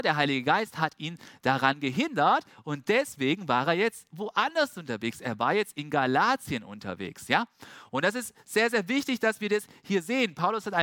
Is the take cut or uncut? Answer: uncut